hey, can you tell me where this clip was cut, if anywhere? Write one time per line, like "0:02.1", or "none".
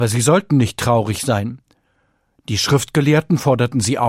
none